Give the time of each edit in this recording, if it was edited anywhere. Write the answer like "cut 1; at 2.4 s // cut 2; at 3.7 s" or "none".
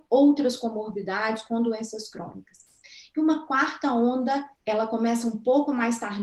cut 1; at 4.6 s